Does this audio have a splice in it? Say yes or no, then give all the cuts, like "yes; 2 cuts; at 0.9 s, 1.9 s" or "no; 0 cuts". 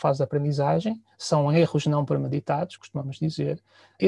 yes; 1 cut; at 2.8 s